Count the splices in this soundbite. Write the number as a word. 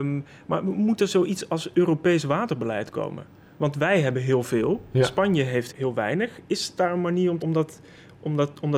three